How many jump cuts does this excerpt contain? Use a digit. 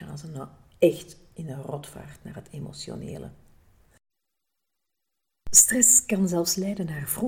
0